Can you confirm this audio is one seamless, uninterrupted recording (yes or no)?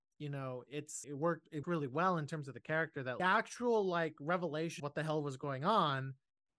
no